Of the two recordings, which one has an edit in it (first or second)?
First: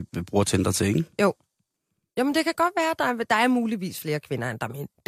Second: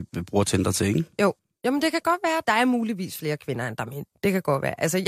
second